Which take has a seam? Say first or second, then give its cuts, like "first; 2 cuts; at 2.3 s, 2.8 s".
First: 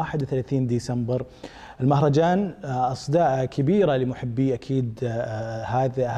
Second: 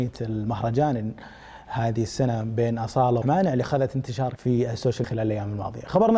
second; 3 cuts; at 3.2 s, 4.4 s, 5.0 s